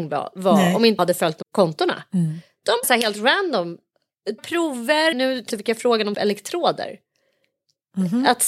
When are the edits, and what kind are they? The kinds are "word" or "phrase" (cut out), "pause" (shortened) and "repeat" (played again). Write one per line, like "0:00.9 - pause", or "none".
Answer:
0:01.0 - word
0:01.4 - word
0:02.8 - word
0:04.4 - word
0:05.1 - word
0:05.5 - word
0:06.1 - word